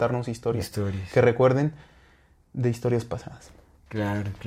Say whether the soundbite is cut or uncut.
uncut